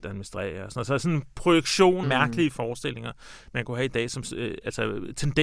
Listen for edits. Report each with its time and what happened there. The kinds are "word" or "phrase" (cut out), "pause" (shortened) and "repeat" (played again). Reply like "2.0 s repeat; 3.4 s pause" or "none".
2.0 s word

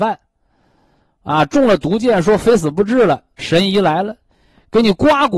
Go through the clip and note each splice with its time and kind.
3.4 s word

